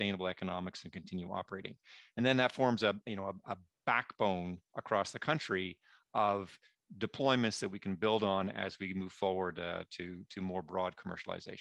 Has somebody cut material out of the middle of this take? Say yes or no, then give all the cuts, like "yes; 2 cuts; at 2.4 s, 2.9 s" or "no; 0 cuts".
no; 0 cuts